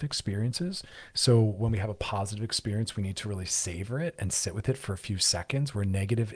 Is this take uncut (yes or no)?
yes